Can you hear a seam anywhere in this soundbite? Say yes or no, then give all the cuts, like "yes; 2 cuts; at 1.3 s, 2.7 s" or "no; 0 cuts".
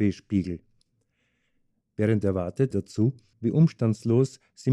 yes; 2 cuts; at 2.7 s, 3.3 s